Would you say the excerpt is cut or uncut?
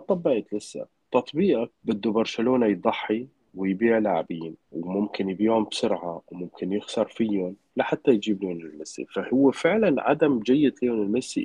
cut